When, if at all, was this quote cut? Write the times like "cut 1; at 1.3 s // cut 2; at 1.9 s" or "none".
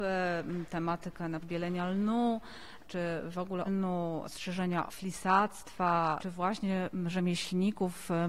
cut 1; at 1.4 s // cut 2; at 3.7 s // cut 3; at 4.9 s

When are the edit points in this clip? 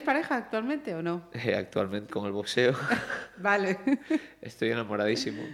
cut 1; at 2.1 s

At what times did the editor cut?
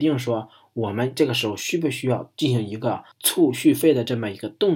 cut 1; at 3.1 s

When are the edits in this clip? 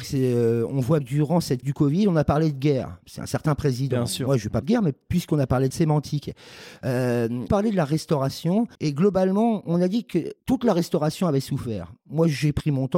cut 1; at 1.0 s // cut 2; at 1.6 s // cut 3; at 3.0 s // cut 4; at 4.6 s // cut 5; at 5.7 s // cut 6; at 7.5 s // cut 7; at 8.7 s // cut 8; at 10.4 s

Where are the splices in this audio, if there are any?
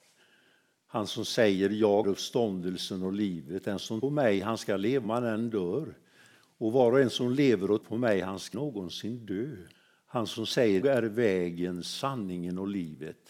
cut 1; at 2.0 s // cut 2; at 4.0 s // cut 3; at 5.0 s // cut 4; at 7.8 s // cut 5; at 8.5 s // cut 6; at 9.7 s // cut 7; at 10.8 s

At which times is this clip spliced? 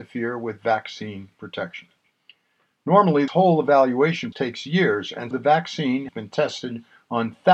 cut 1; at 3.3 s // cut 2; at 4.3 s // cut 3; at 5.3 s // cut 4; at 6.1 s

